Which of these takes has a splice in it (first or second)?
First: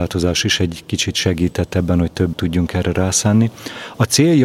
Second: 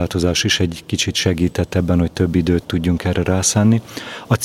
first